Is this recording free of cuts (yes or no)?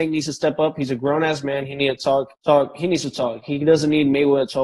no